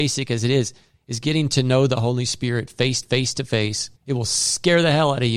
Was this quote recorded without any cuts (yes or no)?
no